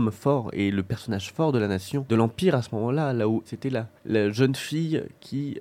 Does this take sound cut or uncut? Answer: cut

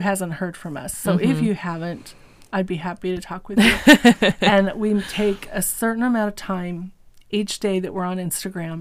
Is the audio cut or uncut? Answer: uncut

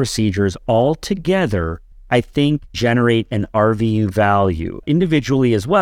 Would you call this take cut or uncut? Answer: uncut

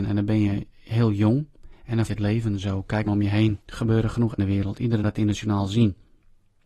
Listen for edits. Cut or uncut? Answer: cut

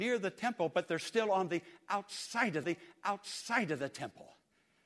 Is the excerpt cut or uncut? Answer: cut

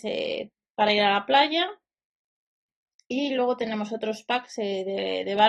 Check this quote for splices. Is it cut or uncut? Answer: uncut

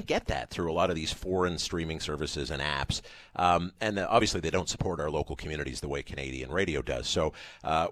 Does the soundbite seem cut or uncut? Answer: uncut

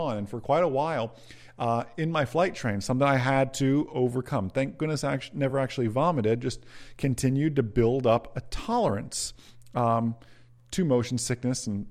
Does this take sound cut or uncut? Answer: uncut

